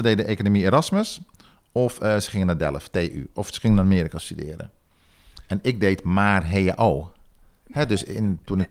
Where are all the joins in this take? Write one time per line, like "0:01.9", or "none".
none